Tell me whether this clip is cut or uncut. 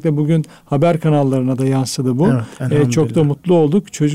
uncut